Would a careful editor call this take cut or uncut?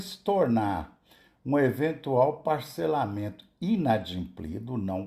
uncut